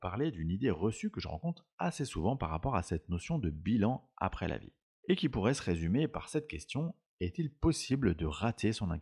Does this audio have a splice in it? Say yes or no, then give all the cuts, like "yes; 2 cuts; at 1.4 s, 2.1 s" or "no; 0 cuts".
no; 0 cuts